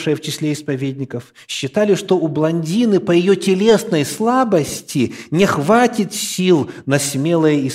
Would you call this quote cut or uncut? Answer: uncut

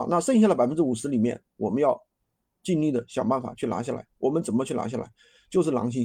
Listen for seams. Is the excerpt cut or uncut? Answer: uncut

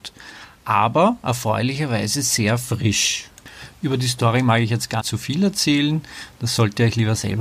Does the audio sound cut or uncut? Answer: cut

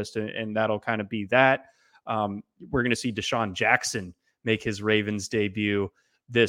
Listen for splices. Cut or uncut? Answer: uncut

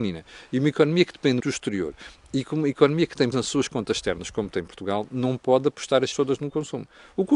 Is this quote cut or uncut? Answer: cut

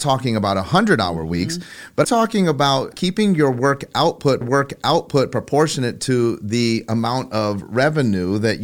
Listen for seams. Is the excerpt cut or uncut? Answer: cut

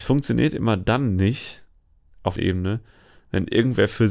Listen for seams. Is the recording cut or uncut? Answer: cut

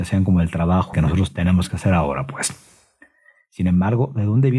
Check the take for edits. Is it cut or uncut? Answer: cut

